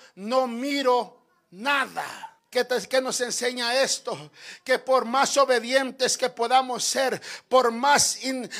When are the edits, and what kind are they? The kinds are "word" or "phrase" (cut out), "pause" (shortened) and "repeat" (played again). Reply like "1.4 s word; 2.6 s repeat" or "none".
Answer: 2.4 s pause

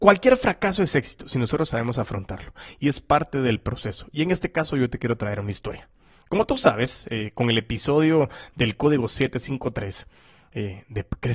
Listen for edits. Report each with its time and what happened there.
none

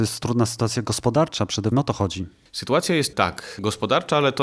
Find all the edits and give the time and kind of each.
1.7 s word; 3.1 s word

